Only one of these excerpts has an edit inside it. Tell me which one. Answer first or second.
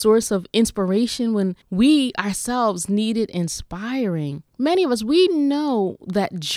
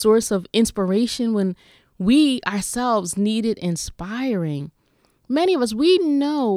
first